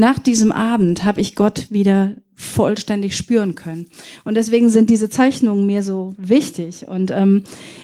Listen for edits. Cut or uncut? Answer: uncut